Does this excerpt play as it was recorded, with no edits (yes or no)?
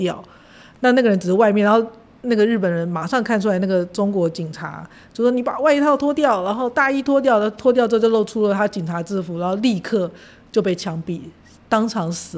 yes